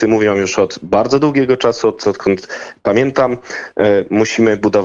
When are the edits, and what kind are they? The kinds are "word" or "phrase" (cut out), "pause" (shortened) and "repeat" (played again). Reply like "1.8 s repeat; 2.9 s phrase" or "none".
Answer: 2.0 s phrase